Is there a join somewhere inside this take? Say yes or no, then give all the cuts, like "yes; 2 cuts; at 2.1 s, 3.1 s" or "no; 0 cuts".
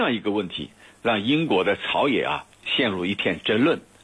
yes; 1 cut; at 2.5 s